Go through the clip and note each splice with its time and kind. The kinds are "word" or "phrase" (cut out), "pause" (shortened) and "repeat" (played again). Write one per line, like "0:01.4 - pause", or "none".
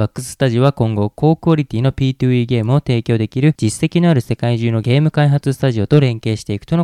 none